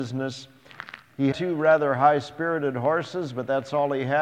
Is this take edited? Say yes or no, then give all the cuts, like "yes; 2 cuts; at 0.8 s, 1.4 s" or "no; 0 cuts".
yes; 1 cut; at 1.3 s